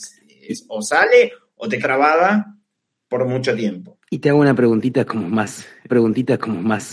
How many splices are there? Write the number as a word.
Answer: three